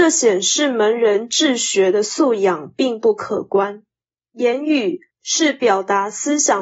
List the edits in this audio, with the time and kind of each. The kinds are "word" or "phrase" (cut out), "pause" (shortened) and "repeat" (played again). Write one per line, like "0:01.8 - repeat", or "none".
0:04.0 - pause
0:05.1 - pause